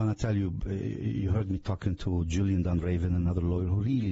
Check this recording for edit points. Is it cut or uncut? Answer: uncut